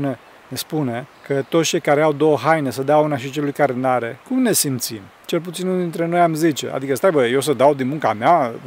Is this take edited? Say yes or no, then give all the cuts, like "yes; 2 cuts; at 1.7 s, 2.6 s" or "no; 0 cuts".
yes; 3 cuts; at 1.1 s, 4.2 s, 5.1 s